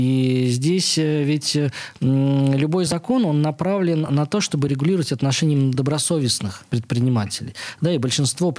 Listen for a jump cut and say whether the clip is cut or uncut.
uncut